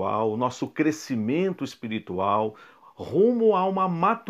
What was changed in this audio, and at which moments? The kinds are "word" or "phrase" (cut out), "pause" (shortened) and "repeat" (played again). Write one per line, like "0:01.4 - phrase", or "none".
none